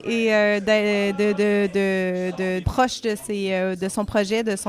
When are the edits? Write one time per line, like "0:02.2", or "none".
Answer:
0:02.6